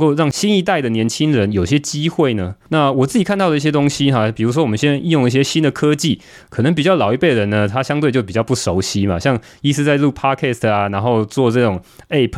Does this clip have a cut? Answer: no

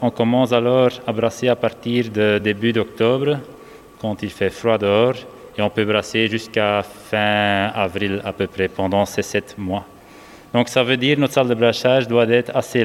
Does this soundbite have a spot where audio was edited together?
no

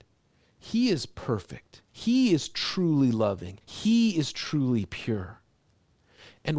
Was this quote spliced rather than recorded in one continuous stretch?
yes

